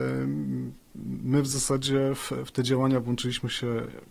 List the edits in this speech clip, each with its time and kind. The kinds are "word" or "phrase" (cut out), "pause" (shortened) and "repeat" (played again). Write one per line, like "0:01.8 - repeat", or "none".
none